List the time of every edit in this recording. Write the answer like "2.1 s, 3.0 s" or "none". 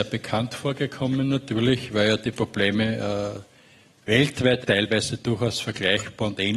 4.6 s

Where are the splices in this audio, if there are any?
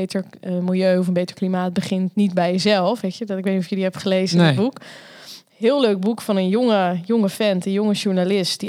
none

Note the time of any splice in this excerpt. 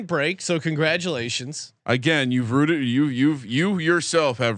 1.8 s

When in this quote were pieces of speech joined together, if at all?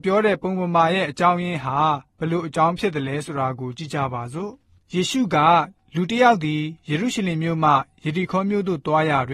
2.1 s

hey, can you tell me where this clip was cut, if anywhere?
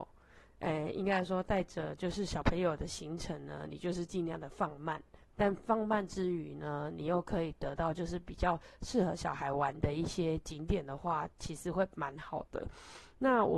5.2 s

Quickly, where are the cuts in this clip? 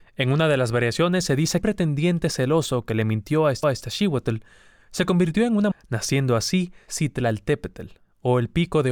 1.6 s, 3.6 s, 5.7 s

